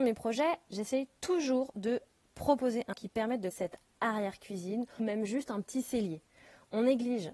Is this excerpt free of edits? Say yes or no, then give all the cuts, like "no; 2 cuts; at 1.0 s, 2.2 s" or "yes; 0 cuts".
no; 3 cuts; at 2.9 s, 3.5 s, 5.0 s